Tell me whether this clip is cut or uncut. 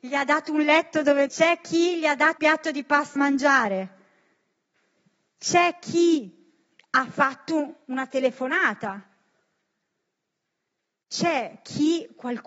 cut